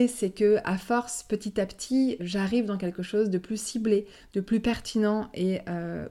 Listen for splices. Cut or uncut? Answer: cut